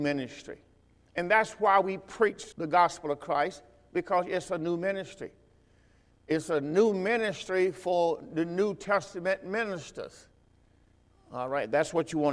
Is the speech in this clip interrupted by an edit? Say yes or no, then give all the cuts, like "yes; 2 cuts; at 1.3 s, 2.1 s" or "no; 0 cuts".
yes; 1 cut; at 2.5 s